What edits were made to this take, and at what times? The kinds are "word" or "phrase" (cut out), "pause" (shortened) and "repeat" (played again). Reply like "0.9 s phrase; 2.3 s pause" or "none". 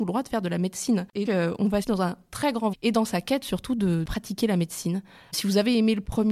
1.2 s word; 1.8 s phrase; 2.7 s word